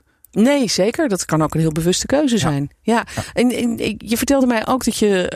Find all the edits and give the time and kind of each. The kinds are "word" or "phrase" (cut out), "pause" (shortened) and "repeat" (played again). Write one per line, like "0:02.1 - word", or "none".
none